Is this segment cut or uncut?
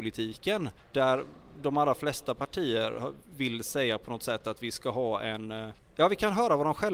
uncut